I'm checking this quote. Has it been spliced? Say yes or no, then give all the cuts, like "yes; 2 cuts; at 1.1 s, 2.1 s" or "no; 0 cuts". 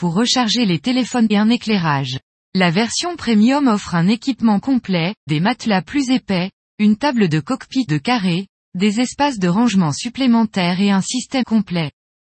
yes; 6 cuts; at 1.3 s, 2.3 s, 4.6 s, 5.3 s, 7.9 s, 11.4 s